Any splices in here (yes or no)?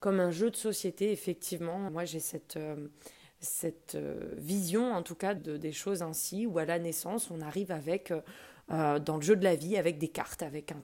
yes